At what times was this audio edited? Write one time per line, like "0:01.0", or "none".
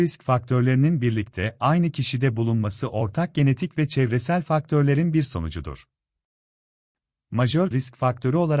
0:07.7